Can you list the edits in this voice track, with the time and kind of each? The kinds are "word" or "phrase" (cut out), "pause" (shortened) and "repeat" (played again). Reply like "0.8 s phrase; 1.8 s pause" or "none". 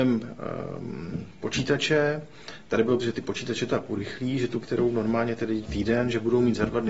3.0 s word; 3.7 s word; 4.6 s word; 5.6 s word